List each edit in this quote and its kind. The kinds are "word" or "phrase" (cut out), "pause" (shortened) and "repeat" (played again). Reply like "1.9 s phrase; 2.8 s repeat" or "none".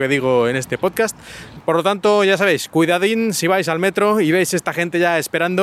none